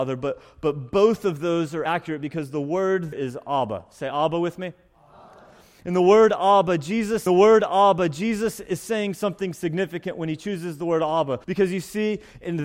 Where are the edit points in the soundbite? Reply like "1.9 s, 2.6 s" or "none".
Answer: 1.9 s, 3.1 s, 7.3 s, 11.4 s